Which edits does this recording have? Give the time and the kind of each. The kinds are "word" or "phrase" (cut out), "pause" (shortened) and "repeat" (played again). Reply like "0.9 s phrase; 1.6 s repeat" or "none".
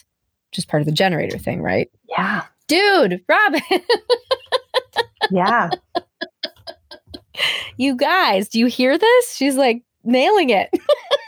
2.0 s pause